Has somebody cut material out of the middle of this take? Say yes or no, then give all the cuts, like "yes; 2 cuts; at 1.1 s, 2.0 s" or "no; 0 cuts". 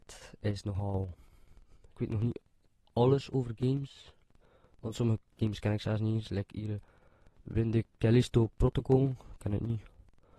yes; 1 cut; at 1.9 s